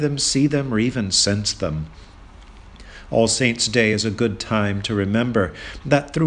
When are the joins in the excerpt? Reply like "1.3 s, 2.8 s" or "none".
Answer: none